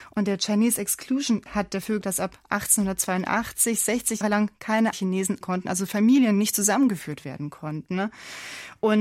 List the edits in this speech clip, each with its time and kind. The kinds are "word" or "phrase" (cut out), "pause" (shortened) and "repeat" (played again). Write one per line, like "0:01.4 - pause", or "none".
0:01.5 - word
0:02.0 - word
0:04.2 - word
0:04.9 - word
0:05.4 - word